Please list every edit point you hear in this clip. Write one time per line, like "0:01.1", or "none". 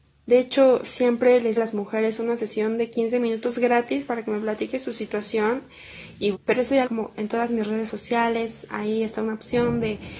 0:01.6
0:06.3
0:06.8